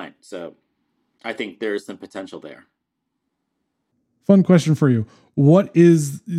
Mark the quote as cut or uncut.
uncut